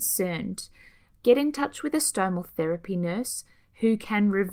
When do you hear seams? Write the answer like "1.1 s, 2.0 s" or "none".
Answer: none

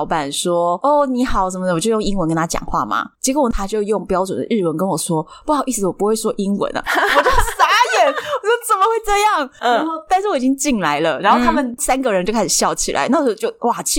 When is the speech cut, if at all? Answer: 3.1 s

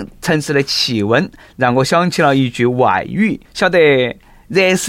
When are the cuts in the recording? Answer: 3.4 s

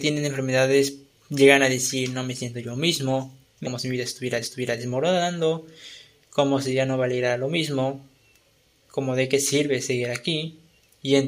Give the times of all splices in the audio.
3.6 s, 4.4 s

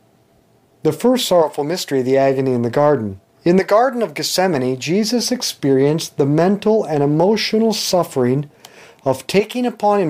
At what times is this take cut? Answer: 3.3 s

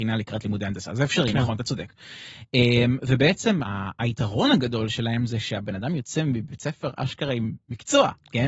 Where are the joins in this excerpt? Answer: 3.6 s

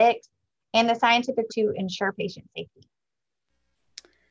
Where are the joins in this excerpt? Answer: 1.5 s

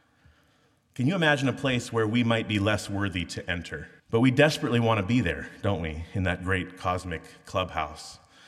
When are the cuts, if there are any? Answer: 4.0 s

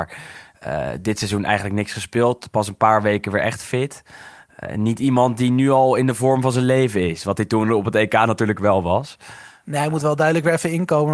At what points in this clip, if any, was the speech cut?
none

